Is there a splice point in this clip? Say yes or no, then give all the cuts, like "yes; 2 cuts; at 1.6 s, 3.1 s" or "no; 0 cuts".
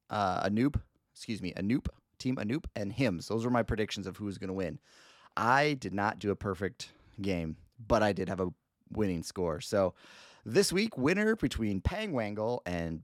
no; 0 cuts